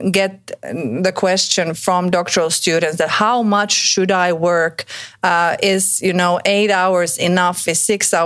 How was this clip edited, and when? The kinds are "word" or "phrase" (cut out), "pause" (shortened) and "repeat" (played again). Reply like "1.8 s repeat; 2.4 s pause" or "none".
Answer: none